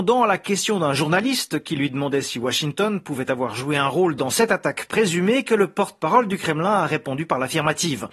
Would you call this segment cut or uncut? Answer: uncut